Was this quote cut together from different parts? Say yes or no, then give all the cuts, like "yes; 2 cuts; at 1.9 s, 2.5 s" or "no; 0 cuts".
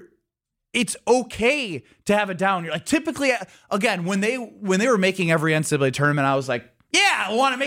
no; 0 cuts